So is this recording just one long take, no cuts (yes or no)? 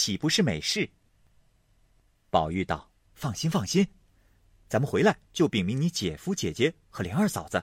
no